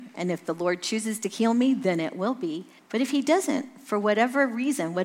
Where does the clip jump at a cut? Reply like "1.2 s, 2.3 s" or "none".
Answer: 2.8 s